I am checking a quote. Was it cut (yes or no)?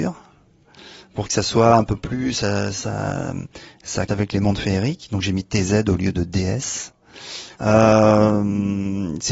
yes